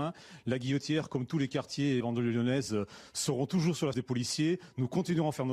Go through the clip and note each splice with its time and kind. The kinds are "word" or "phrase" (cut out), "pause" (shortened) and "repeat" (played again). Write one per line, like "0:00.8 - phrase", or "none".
0:02.0 - phrase
0:03.9 - word